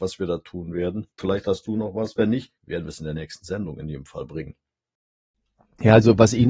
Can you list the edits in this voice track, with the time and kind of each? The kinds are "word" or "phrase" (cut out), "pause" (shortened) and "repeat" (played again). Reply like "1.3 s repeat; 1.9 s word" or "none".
1.1 s pause; 2.6 s pause